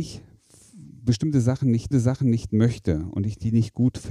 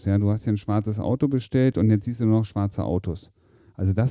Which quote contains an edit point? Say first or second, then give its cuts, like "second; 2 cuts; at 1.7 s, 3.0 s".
first; 1 cut; at 1.9 s